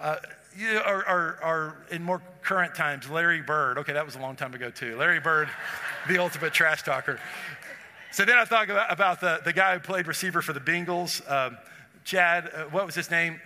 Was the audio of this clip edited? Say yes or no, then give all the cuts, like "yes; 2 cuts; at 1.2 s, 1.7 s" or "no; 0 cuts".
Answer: no; 0 cuts